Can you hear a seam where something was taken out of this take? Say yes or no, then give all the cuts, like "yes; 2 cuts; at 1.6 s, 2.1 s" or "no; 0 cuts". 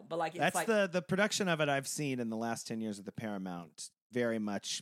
no; 0 cuts